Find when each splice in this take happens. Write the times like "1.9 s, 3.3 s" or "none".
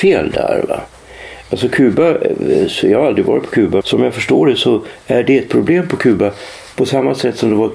3.8 s